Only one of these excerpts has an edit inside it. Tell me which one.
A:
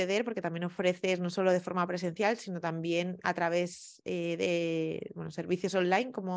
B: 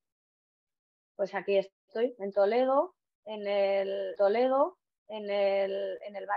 B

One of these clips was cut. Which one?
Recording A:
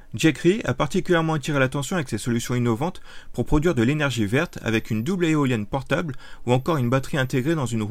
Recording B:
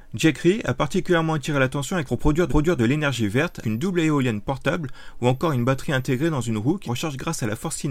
B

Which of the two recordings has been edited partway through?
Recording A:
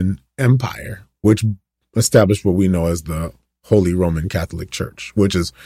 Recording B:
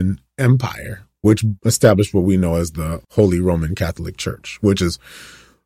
B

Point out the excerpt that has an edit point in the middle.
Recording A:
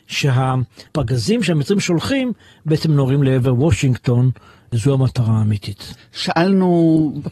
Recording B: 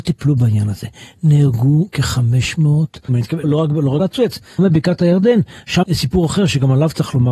B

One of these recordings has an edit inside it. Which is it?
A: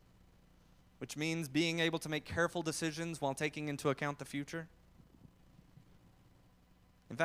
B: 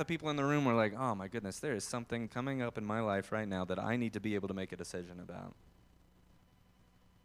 B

